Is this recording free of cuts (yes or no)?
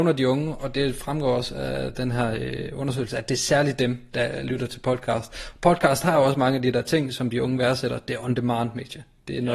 yes